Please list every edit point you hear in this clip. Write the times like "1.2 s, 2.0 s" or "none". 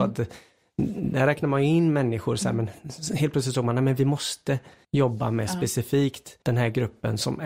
4.8 s, 6.4 s